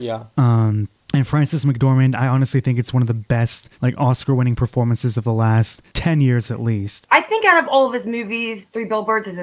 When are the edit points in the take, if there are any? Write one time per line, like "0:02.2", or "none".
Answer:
0:01.0
0:03.7
0:05.9